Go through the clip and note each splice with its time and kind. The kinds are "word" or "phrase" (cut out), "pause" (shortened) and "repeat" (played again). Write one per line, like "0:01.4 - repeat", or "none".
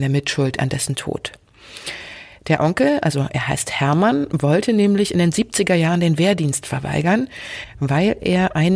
none